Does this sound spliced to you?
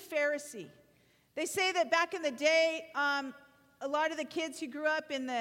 no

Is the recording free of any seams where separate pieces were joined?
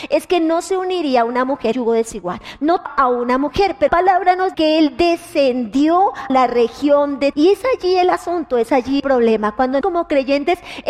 no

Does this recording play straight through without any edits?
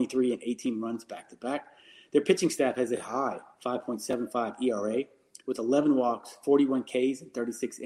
yes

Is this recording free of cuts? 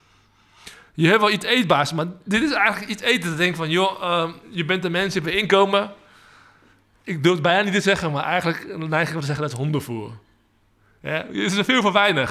yes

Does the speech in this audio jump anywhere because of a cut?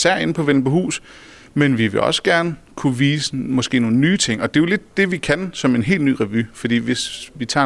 no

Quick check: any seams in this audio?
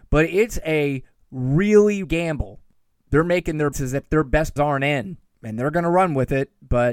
yes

